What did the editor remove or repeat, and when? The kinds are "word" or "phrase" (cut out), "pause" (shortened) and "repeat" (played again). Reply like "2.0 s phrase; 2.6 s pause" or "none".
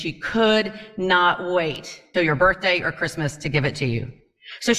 2.1 s word

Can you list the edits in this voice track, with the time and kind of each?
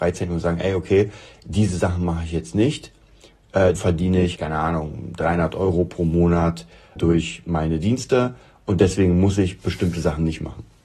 3.8 s word; 4.4 s word; 7.0 s word

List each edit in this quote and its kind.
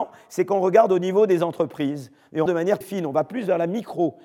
2.5 s word; 2.8 s word

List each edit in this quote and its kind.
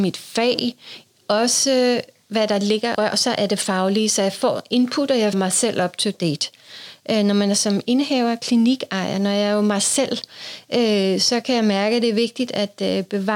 2.9 s word; 5.3 s word

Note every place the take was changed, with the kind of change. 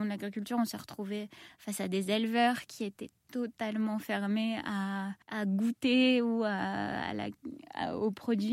5.2 s pause

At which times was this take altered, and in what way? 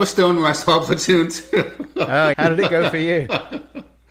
2.3 s word

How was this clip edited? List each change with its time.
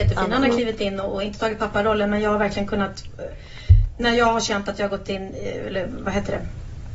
none

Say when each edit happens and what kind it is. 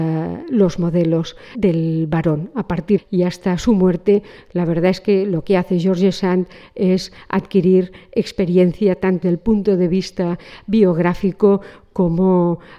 1.5 s word; 3.0 s phrase; 9.2 s word

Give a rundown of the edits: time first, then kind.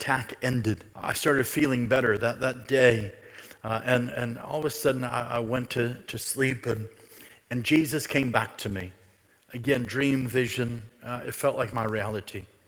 0.9 s pause

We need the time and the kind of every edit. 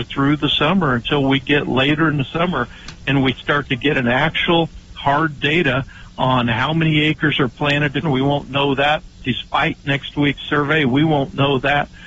8.0 s word

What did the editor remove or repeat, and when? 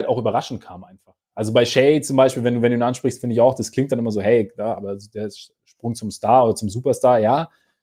none

